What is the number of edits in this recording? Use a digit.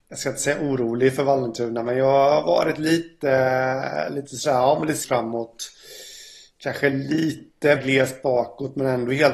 2